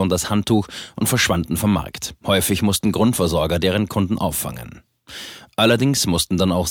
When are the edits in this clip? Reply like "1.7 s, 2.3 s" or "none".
2.2 s